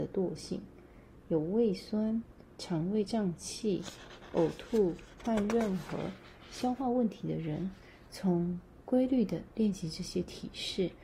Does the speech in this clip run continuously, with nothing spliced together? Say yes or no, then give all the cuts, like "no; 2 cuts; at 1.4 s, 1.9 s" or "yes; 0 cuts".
yes; 0 cuts